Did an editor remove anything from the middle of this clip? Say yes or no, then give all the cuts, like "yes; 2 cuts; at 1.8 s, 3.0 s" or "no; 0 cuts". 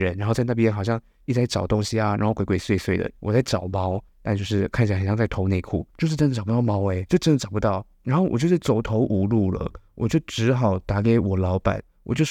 yes; 4 cuts; at 3.2 s, 4.1 s, 5.9 s, 7.9 s